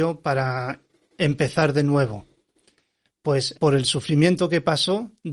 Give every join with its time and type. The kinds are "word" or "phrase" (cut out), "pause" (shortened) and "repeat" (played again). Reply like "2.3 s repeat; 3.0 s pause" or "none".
3.6 s word